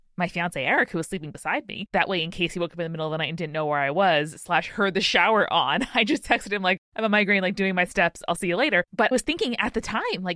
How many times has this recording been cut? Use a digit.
2